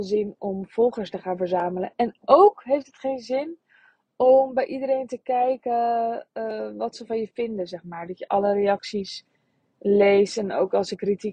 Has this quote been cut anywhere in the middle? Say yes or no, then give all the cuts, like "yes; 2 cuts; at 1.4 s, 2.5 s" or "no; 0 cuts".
no; 0 cuts